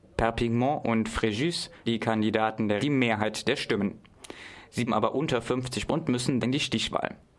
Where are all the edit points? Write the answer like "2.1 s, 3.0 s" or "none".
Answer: 1.9 s, 2.8 s, 4.9 s, 5.9 s, 6.4 s

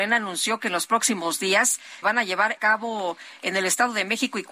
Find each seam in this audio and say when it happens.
2.0 s, 2.6 s

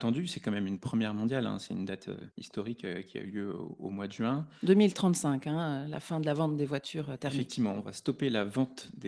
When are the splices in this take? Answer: 2.3 s

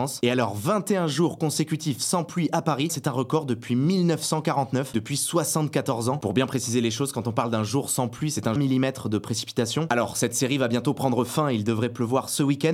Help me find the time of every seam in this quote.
2.9 s, 4.9 s, 8.6 s

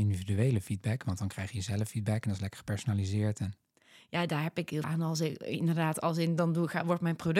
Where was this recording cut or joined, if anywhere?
4.8 s

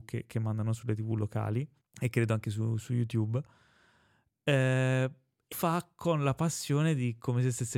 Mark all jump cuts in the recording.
1.8 s, 5.5 s

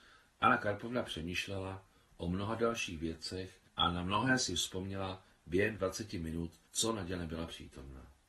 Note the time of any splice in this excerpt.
3.7 s, 5.8 s, 6.7 s

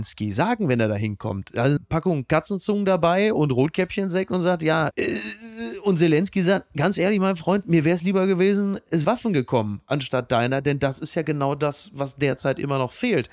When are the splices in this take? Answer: 1.8 s, 4.9 s, 9.0 s

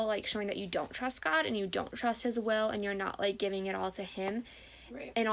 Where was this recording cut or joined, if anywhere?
none

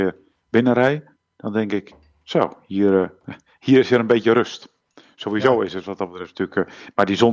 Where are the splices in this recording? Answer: none

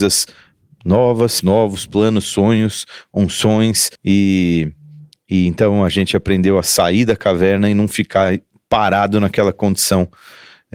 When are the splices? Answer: 1.4 s, 4.0 s

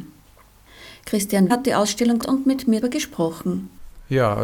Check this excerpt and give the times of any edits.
1.5 s, 2.2 s, 2.8 s

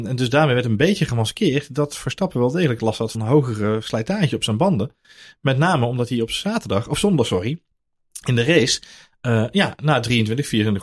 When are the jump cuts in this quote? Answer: 3.1 s

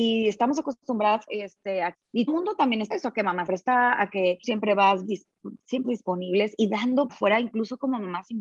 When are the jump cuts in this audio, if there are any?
1.3 s, 1.9 s, 2.3 s, 2.9 s, 3.5 s, 4.4 s, 5.1 s, 5.8 s, 7.1 s

